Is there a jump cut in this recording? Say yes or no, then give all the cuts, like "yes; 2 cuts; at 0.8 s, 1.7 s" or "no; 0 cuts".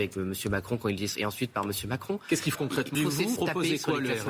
yes; 4 cuts; at 1.1 s, 2.5 s, 2.9 s, 3.4 s